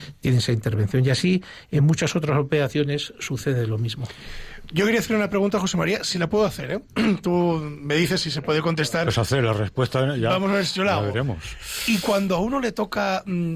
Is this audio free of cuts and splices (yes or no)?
yes